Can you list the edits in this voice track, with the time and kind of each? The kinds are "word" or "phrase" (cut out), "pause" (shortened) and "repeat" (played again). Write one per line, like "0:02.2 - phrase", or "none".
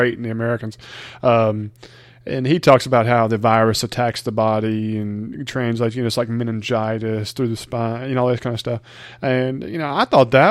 none